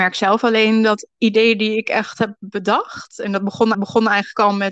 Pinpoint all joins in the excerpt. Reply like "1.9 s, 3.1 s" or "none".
1.1 s, 3.7 s